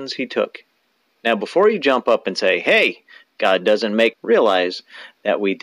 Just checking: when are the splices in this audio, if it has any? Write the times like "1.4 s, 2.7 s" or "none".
4.1 s